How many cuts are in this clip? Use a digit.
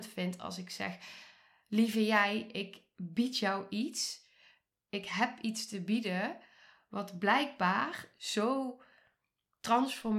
0